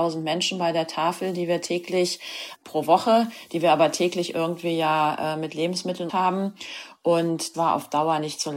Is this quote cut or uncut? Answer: cut